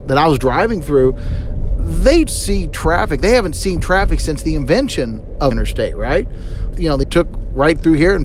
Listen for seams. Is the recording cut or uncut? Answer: cut